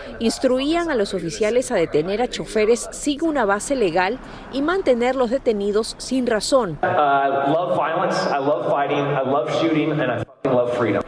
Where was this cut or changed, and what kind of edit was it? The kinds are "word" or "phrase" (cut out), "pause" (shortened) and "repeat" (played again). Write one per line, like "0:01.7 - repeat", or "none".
none